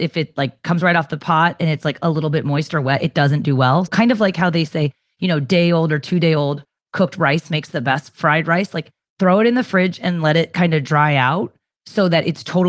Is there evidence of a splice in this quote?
yes; 1 cut; at 3.9 s

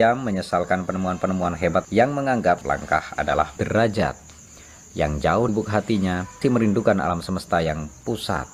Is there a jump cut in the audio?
yes; 5 cuts; at 1.8 s, 2.6 s, 3.6 s, 5.5 s, 6.4 s

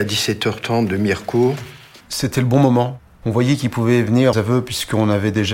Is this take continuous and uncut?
no; 2 cuts; at 2.0 s, 4.3 s

